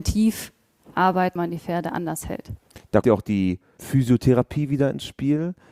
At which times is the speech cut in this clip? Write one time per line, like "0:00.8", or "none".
0:01.4
0:03.0
0:03.8